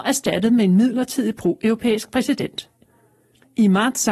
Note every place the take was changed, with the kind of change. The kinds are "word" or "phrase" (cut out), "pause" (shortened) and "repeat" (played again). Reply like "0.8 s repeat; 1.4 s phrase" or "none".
none